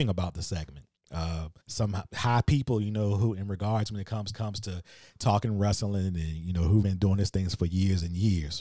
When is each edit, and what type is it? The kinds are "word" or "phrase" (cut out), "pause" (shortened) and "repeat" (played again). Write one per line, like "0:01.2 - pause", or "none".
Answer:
0:01.6 - pause
0:04.3 - repeat
0:06.8 - word